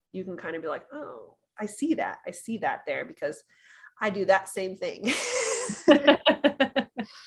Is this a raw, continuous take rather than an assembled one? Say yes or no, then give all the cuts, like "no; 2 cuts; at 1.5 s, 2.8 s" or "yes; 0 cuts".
no; 1 cut; at 1.6 s